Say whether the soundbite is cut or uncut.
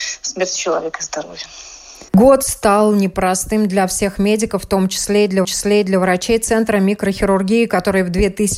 cut